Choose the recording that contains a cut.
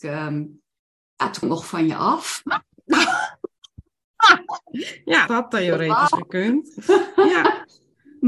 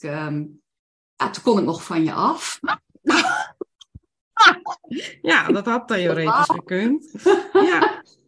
first; 2 cuts; at 1.4 s, 5.3 s

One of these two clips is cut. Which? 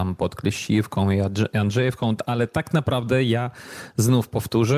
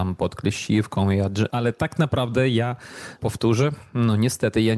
second; 2 cuts; at 1.5 s, 3.2 s

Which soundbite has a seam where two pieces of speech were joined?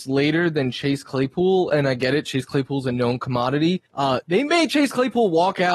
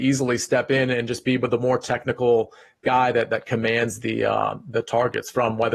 first; 1 cut; at 3.9 s

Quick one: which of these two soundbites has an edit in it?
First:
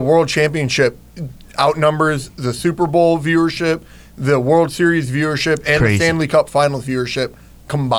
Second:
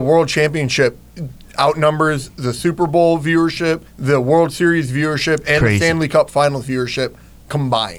second; 1 cut; at 3.9 s

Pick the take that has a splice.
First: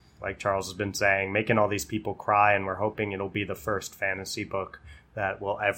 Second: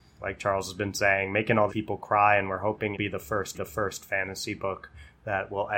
second; 3 cuts; at 1.7 s, 2.9 s, 3.5 s

